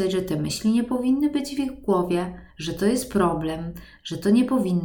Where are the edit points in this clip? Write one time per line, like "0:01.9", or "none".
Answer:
0:02.5